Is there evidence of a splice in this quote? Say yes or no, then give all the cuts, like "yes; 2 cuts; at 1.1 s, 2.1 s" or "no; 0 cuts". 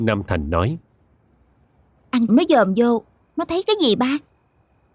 yes; 1 cut; at 2.3 s